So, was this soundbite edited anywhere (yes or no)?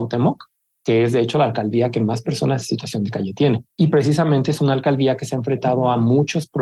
yes